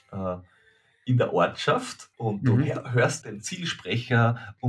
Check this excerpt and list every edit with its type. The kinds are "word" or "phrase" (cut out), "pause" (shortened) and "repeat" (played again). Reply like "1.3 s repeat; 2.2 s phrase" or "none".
2.1 s pause; 3.2 s word